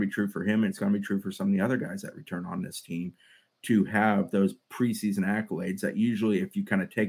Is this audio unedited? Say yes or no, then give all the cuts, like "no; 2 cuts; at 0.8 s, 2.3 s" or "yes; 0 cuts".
yes; 0 cuts